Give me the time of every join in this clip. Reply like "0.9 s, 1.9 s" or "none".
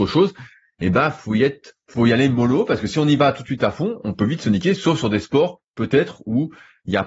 1.8 s